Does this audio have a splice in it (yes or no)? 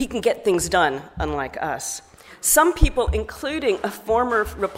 no